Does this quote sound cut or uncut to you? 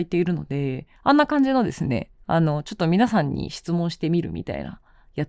cut